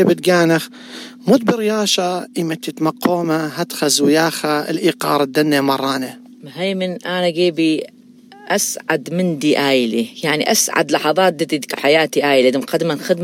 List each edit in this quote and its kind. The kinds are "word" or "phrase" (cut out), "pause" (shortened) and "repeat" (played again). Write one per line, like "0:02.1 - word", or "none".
0:11.8 - word

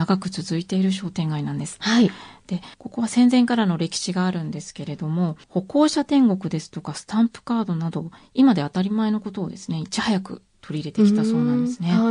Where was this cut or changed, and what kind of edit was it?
0:02.7 - pause
0:05.4 - pause

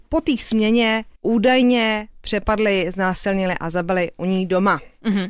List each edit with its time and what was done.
0:01.2 - pause

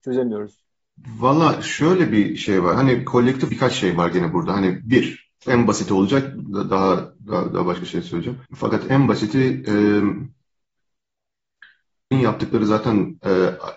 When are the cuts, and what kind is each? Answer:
0:03.5 - word
0:05.5 - word
0:07.2 - pause
0:08.5 - pause
0:12.1 - phrase

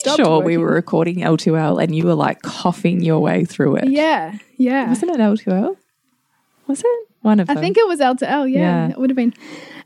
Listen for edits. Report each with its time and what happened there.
none

